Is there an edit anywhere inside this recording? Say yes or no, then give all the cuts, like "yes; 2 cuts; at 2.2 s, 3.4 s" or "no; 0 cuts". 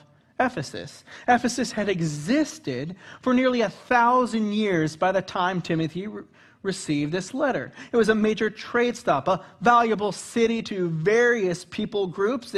no; 0 cuts